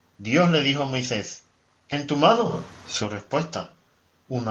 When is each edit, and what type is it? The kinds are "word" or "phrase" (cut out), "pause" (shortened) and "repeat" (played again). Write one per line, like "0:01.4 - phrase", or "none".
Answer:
0:01.9 - word